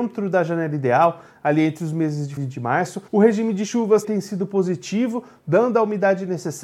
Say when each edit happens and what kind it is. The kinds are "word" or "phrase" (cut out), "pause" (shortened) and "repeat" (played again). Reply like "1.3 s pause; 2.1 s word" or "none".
2.4 s word; 3.1 s pause; 4.0 s word